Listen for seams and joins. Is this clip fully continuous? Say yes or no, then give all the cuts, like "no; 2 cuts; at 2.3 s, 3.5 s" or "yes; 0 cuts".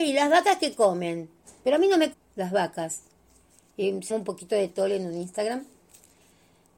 no; 3 cuts; at 2.1 s, 4.1 s, 4.7 s